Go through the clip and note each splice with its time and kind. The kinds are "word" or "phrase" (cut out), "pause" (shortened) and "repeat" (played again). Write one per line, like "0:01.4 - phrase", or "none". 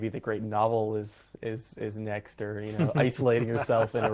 none